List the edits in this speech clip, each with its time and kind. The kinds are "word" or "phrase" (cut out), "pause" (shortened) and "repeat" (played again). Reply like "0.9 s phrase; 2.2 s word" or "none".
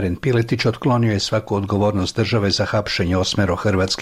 none

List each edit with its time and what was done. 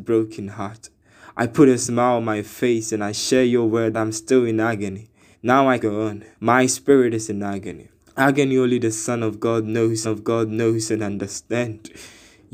3.9 s phrase; 5.3 s pause; 5.8 s word; 6.3 s pause; 8.0 s pause; 10.0 s repeat

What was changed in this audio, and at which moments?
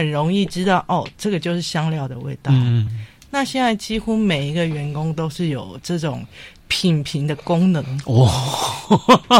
2.9 s word

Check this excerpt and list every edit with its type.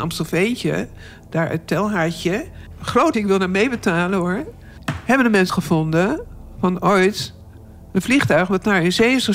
3.1 s word; 5.5 s word

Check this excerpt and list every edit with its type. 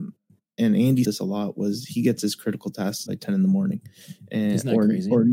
1.0 s word; 3.1 s word

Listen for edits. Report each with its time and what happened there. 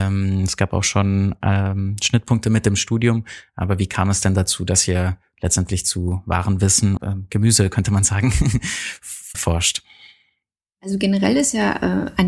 7.0 s phrase; 9.3 s word

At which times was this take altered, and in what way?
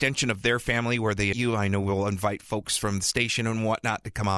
1.3 s word

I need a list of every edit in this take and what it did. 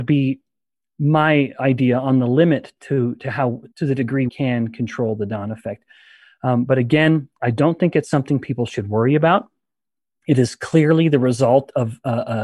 3.7 s pause; 4.3 s word

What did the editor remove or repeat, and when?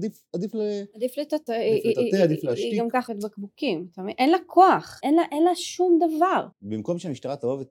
1.5 s word; 3.1 s word; 5.0 s word; 6.5 s pause

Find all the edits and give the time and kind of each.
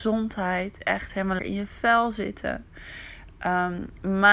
1.4 s word

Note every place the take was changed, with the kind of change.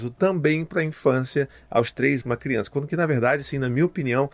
2.2 s word

